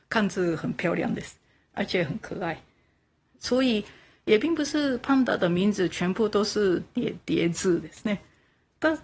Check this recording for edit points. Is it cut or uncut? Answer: uncut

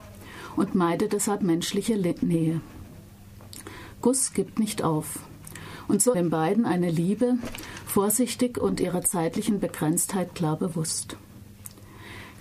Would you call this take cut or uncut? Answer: cut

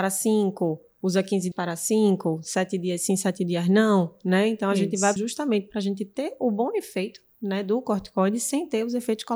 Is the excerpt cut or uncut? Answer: cut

